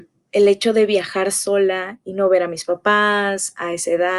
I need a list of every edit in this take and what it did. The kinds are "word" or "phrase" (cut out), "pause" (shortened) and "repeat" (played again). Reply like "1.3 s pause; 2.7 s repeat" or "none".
2.0 s word